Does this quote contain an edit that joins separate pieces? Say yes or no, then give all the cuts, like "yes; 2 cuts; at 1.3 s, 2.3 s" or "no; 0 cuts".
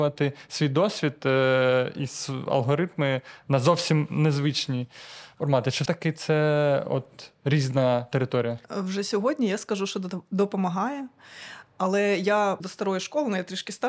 yes; 3 cuts; at 5.9 s, 8.6 s, 12.6 s